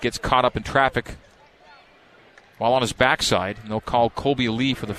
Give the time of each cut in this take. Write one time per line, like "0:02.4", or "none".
none